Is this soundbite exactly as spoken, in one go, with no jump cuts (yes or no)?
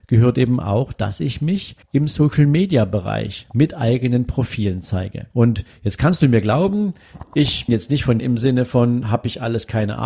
no